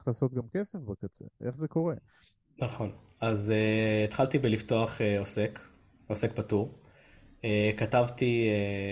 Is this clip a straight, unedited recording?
yes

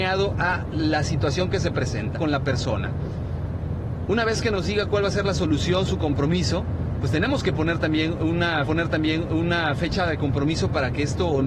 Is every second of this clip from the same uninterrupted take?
no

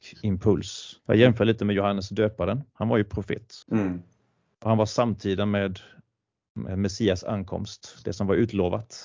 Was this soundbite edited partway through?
yes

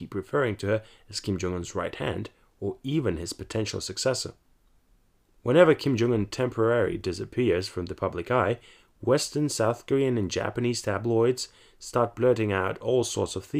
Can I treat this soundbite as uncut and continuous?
yes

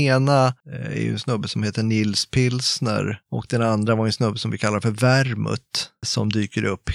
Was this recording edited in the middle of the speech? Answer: no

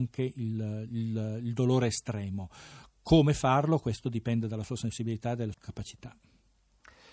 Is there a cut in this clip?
yes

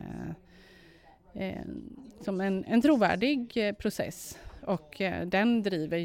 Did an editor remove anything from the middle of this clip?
yes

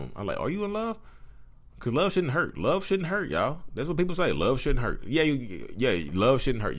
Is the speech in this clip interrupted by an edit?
no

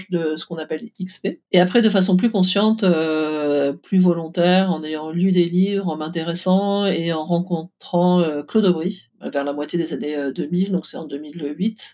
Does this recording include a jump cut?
yes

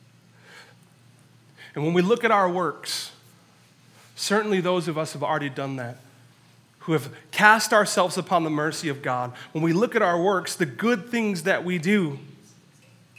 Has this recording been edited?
no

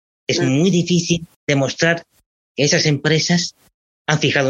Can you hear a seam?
yes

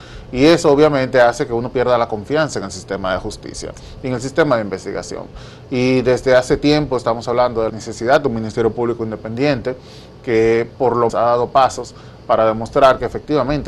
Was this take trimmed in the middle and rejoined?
yes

